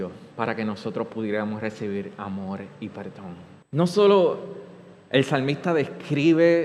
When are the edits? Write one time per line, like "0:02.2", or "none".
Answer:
0:03.6